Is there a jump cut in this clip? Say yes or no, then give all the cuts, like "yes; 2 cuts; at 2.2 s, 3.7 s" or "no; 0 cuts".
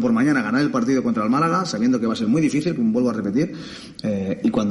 no; 0 cuts